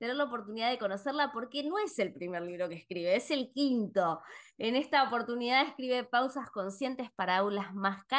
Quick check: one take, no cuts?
yes; 0 cuts

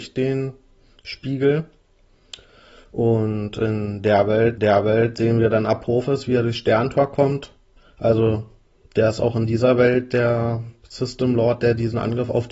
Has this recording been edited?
yes; 1 cut; at 4.6 s

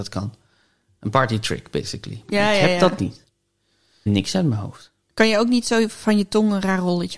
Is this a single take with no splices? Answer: no; 2 cuts; at 4.1 s, 5.0 s

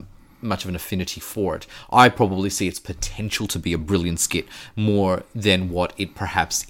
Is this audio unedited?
yes; 0 cuts

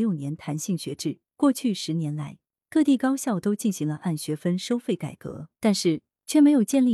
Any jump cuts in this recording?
yes; 2 cuts; at 1.3 s, 5.5 s

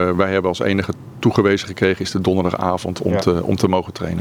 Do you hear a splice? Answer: no; 0 cuts

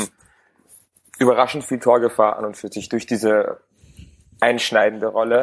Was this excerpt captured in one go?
yes; 0 cuts

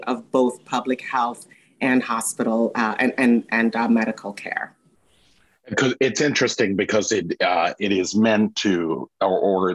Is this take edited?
no; 0 cuts

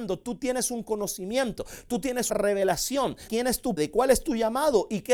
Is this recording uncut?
no; 3 cuts; at 2.3 s, 3.3 s, 3.8 s

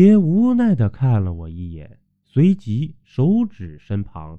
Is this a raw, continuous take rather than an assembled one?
yes; 0 cuts

